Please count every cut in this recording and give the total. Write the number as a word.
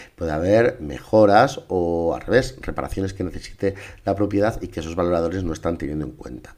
zero